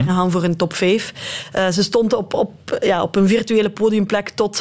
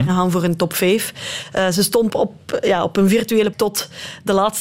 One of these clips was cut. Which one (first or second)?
second